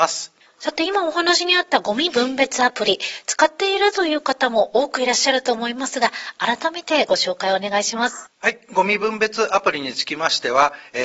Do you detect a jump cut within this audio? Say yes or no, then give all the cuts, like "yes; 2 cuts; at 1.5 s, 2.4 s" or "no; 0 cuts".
yes; 1 cut; at 8.3 s